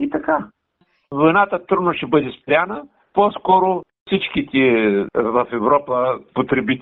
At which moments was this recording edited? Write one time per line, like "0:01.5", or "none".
none